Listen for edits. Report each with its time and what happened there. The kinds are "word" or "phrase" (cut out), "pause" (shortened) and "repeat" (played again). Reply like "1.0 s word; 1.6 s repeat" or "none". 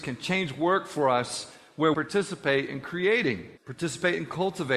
1.9 s phrase; 3.6 s pause